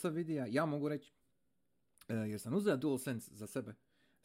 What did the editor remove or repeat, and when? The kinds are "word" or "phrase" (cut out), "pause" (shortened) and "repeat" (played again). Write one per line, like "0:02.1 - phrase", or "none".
none